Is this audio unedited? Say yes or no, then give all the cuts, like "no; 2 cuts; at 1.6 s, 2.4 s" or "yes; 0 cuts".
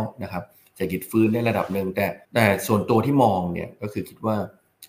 no; 1 cut; at 2.2 s